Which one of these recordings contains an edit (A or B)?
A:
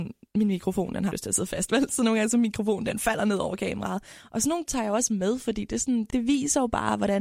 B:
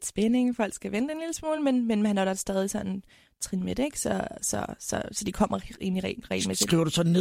A